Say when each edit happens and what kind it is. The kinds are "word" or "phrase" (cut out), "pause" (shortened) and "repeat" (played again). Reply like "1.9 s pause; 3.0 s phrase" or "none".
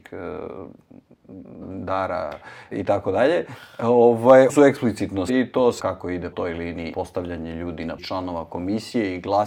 1.6 s word; 2.7 s word; 4.5 s word; 5.3 s word; 5.8 s word; 6.3 s word; 6.9 s word; 8.0 s word